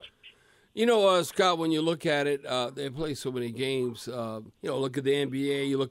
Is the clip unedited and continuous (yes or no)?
no